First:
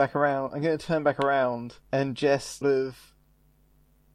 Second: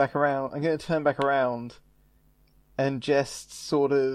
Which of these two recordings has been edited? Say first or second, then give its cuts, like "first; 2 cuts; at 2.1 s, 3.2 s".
first; 2 cuts; at 1.8 s, 2.6 s